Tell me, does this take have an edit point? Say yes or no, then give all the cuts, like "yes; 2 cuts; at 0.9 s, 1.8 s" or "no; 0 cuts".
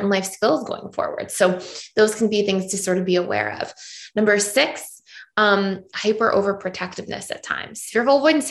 no; 0 cuts